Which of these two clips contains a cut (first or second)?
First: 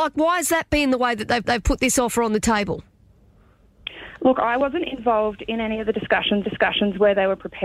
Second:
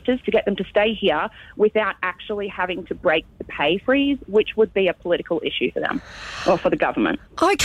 first